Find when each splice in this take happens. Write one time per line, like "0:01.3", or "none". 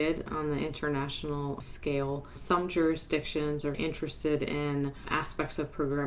0:03.7